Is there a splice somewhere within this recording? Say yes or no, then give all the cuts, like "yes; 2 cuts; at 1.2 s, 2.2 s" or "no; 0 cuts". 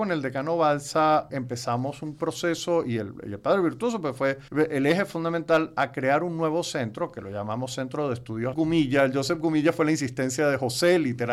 yes; 3 cuts; at 1.3 s, 4.5 s, 8.5 s